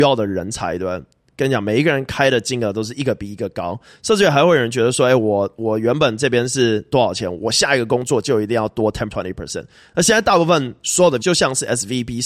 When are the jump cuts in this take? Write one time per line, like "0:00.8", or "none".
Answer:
0:09.1
0:11.2